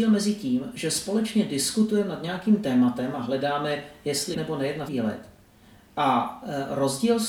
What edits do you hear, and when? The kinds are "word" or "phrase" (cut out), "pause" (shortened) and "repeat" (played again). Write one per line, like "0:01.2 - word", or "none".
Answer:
0:04.3 - word
0:04.9 - word